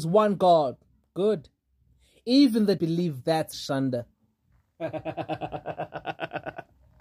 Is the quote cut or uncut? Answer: cut